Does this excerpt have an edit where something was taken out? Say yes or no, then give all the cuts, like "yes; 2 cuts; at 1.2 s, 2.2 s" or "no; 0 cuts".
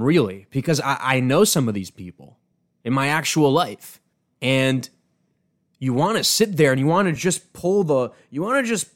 no; 0 cuts